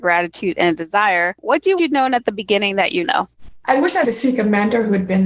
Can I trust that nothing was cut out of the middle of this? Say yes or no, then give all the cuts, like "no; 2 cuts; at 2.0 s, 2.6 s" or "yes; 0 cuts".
no; 3 cuts; at 1.8 s, 3.0 s, 4.0 s